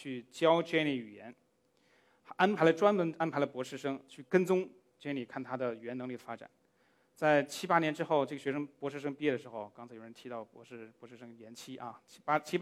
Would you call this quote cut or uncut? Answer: uncut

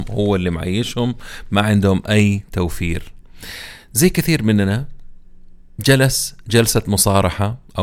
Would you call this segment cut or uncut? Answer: uncut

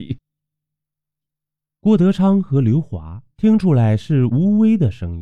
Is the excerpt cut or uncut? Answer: uncut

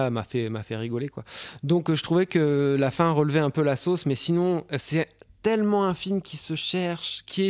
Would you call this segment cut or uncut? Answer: uncut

